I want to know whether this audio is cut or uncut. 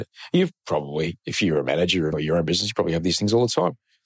cut